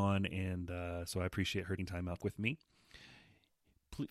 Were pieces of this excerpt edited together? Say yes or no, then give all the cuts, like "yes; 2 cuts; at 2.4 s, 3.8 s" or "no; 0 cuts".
yes; 2 cuts; at 1.8 s, 2.2 s